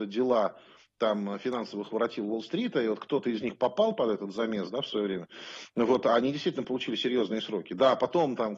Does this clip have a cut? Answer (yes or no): no